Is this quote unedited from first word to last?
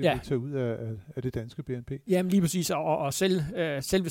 yes; 0 cuts

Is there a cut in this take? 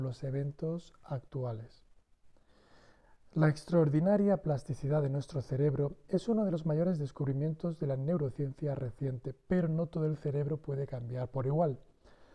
no; 0 cuts

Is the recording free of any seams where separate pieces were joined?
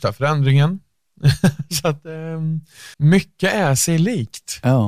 no; 1 cut; at 2.9 s

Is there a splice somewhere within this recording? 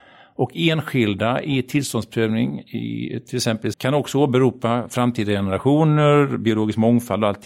yes; 1 cut; at 3.7 s

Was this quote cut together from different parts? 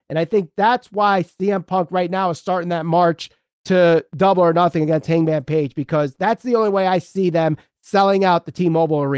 no; 0 cuts

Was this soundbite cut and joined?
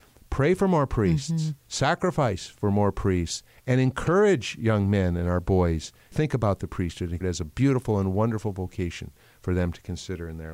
yes; 3 cuts; at 1.6 s, 6.1 s, 7.2 s

